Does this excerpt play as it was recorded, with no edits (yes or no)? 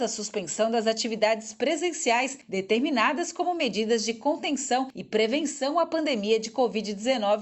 yes